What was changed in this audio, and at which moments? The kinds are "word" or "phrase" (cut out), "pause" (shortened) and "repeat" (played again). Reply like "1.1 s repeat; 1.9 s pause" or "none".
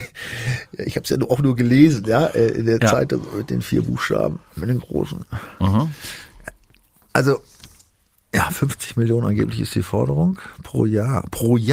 none